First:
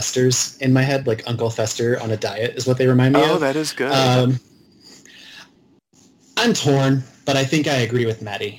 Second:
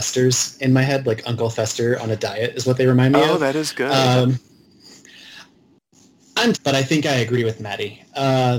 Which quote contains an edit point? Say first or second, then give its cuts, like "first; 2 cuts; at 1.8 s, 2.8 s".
second; 1 cut; at 6.5 s